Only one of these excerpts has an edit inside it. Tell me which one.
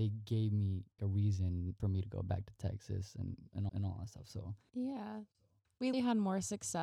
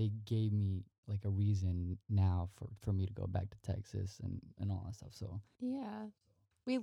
first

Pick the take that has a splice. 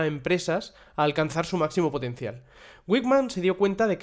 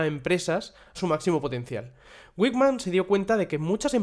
second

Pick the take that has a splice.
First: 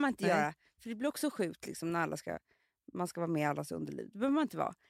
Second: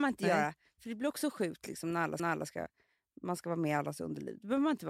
second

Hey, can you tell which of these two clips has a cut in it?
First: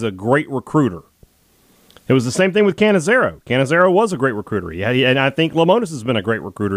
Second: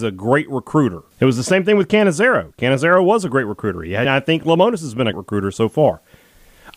second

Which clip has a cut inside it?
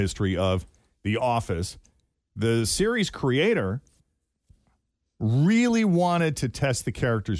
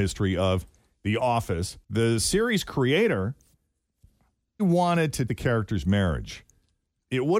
second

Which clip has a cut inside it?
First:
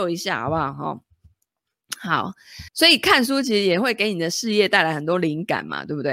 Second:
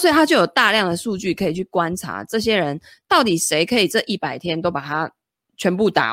first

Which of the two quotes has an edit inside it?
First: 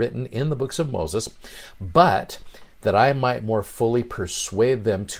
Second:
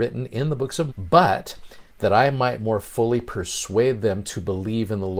second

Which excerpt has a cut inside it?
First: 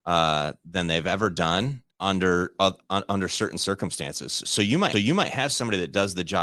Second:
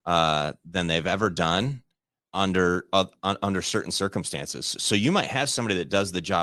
first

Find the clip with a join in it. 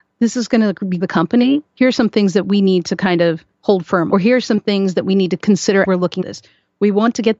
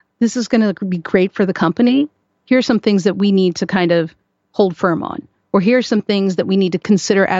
first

